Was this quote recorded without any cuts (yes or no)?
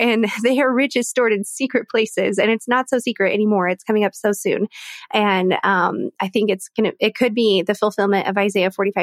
yes